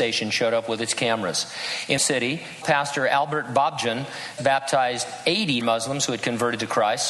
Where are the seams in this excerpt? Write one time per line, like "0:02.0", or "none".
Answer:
0:02.0
0:02.6
0:04.4
0:05.6

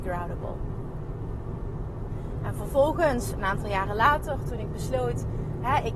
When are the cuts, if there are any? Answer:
none

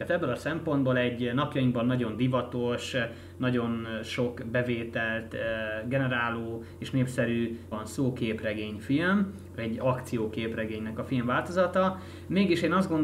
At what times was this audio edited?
0:07.7

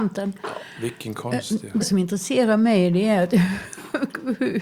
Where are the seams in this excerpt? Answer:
0:01.8

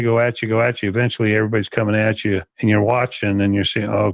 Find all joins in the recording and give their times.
0:02.5

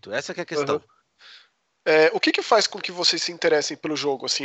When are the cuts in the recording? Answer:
none

